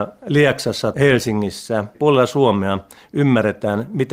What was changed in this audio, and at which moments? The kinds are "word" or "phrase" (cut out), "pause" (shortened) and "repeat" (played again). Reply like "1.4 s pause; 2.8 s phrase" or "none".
0.9 s word; 1.9 s word